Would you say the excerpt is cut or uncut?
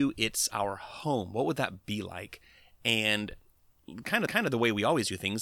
cut